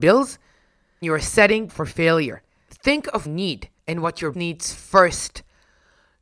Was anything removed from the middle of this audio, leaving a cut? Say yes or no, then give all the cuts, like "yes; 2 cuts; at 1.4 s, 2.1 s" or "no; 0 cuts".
yes; 5 cuts; at 1.0 s, 1.7 s, 3.2 s, 3.8 s, 4.3 s